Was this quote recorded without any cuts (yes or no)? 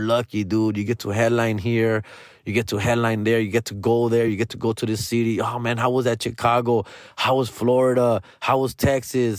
yes